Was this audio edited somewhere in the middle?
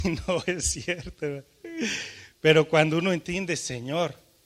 no; 0 cuts

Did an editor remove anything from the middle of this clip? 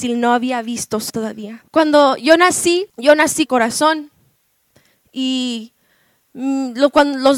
yes; 4 cuts; at 1.1 s, 1.7 s, 2.9 s, 3.5 s

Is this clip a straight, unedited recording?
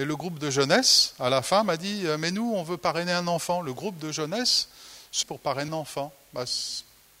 no; 2 cuts; at 5.2 s, 5.7 s

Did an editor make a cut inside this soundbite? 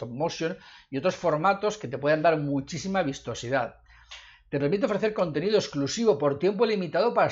no; 0 cuts

